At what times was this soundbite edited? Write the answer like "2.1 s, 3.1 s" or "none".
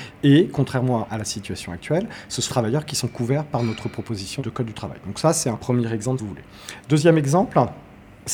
2.5 s, 6.2 s